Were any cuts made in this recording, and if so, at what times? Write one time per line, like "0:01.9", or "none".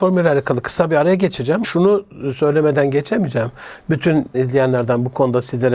0:01.6
0:04.3